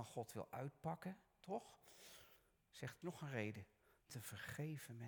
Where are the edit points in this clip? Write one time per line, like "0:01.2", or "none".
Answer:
0:03.0
0:04.1

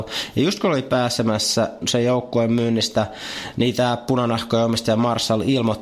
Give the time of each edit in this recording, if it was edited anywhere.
0:01.8

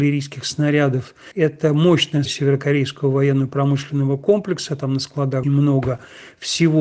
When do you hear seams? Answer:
0:01.3
0:02.3
0:05.4

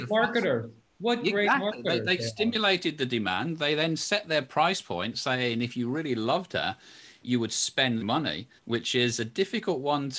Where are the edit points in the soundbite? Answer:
0:08.0
0:08.6

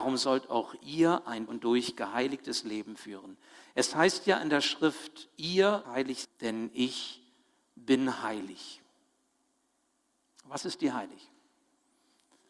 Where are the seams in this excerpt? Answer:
0:01.5
0:05.8
0:06.2

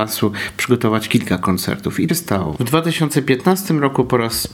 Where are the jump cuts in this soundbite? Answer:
0:02.1

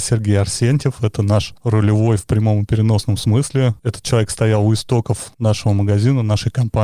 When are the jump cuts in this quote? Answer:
none

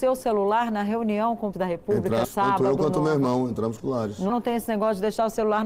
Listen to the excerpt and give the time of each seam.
0:01.5
0:02.2
0:03.8
0:04.3

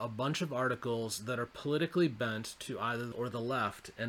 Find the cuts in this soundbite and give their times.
0:03.1

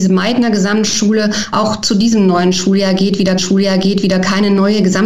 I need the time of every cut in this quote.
0:01.5
0:03.4

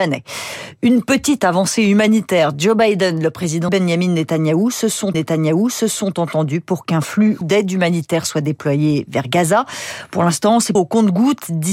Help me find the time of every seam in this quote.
0:03.7
0:05.1
0:07.4
0:10.8

